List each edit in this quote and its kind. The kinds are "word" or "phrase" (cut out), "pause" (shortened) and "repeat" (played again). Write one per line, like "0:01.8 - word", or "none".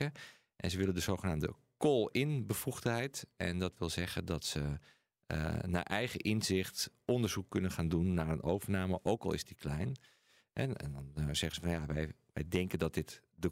none